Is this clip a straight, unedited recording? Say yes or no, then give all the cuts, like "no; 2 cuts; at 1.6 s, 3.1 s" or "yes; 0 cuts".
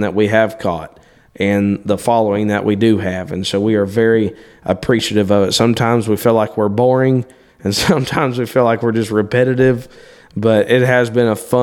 yes; 0 cuts